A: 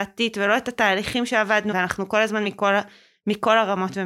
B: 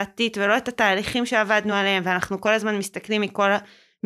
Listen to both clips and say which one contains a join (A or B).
A